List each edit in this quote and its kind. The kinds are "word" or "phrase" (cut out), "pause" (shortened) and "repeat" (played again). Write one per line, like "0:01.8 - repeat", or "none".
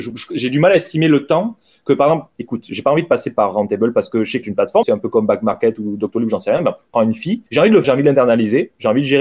0:02.3 - pause
0:04.4 - phrase
0:04.8 - word
0:06.9 - phrase
0:07.5 - pause
0:07.8 - word